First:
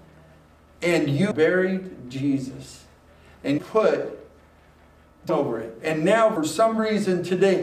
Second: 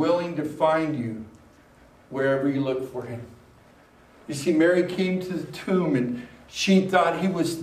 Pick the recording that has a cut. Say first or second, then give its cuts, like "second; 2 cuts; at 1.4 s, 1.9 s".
first; 4 cuts; at 1.3 s, 3.6 s, 5.3 s, 6.4 s